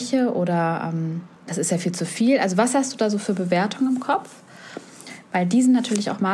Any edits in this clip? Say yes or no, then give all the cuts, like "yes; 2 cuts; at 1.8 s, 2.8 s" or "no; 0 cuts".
yes; 1 cut; at 1.4 s